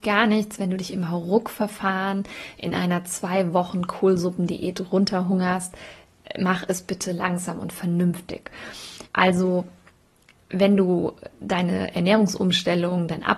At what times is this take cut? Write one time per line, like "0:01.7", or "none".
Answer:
0:09.1